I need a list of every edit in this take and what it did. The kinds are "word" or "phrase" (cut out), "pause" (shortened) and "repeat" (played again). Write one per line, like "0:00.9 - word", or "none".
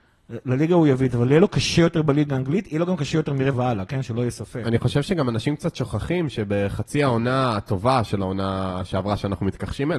0:03.5 - word